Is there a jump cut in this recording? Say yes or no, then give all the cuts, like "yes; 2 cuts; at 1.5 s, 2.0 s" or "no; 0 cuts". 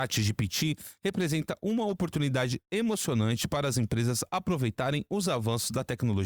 no; 0 cuts